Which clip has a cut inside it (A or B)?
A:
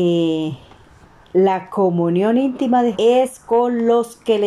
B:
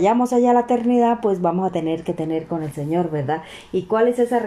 A